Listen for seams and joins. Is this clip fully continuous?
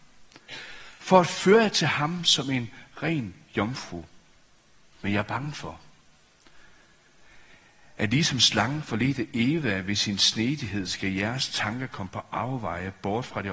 yes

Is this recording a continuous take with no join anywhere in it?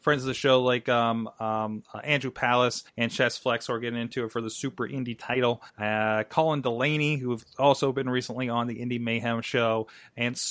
no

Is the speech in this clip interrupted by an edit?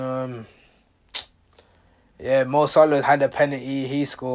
no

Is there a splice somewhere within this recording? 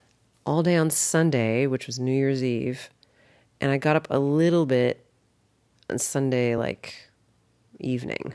no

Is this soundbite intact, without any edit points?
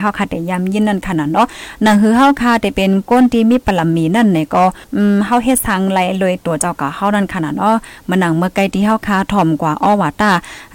no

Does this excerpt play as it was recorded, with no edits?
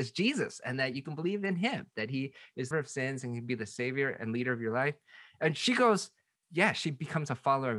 no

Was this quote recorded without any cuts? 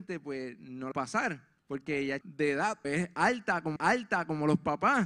no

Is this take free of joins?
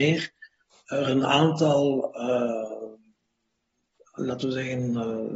yes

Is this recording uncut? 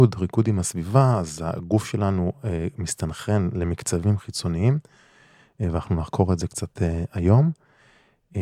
yes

